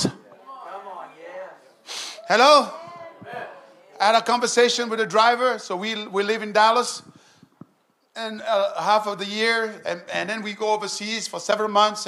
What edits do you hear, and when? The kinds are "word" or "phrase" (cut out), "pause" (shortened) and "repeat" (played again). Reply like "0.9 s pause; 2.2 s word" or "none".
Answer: none